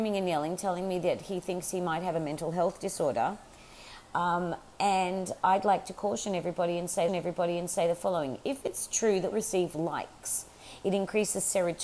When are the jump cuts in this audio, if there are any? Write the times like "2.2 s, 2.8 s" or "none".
7.1 s, 9.3 s